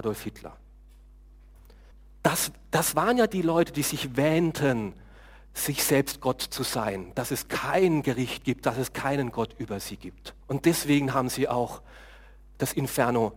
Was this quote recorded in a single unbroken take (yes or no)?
no